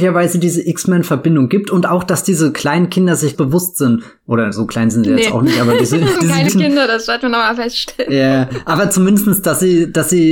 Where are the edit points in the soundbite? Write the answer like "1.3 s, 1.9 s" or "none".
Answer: 3.3 s, 6.2 s, 6.5 s